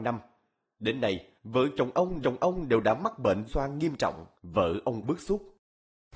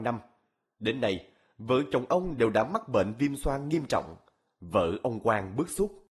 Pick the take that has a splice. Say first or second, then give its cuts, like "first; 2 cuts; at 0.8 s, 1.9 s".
first; 5 cuts; at 1.4 s, 2.2 s, 3.5 s, 4.3 s, 5.0 s